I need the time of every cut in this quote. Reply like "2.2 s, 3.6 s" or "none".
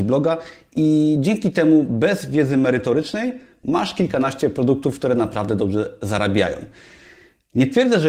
none